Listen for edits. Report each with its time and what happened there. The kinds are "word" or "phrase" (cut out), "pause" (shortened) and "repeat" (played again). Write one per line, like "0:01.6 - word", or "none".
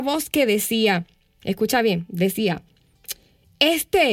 none